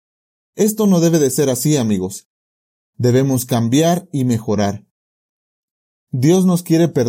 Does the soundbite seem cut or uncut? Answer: uncut